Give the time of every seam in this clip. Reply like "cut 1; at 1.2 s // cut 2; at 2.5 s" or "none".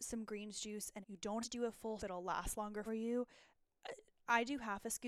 cut 1; at 1.0 s // cut 2; at 1.4 s // cut 3; at 2.0 s // cut 4; at 2.9 s